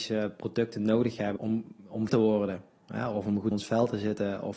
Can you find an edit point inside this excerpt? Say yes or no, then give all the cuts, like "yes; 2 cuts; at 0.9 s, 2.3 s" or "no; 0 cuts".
yes; 3 cuts; at 1.4 s, 2.1 s, 3.5 s